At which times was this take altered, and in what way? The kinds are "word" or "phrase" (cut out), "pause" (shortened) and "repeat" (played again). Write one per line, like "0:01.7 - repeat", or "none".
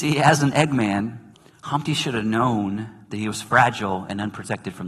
0:01.3 - pause